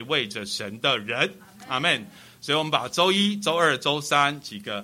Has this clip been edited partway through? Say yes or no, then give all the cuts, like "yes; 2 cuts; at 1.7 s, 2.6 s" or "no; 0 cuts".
no; 0 cuts